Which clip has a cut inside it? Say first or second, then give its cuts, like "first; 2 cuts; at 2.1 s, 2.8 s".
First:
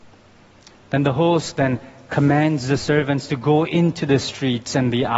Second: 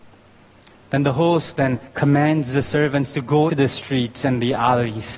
second; 2 cuts; at 1.9 s, 3.5 s